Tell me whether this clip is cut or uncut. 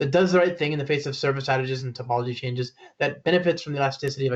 uncut